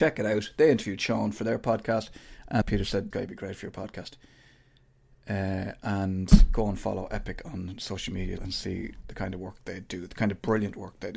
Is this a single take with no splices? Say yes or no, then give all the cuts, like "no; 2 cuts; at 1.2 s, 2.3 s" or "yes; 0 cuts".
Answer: no; 3 cuts; at 2.6 s, 3.1 s, 8.4 s